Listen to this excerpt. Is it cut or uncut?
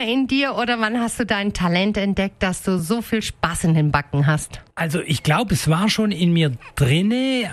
uncut